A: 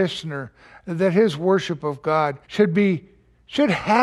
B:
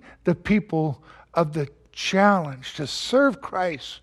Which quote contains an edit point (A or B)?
A